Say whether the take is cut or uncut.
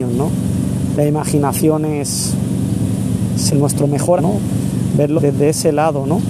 cut